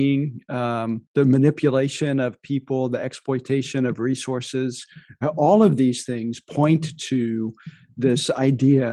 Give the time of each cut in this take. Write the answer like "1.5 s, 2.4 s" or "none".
1.1 s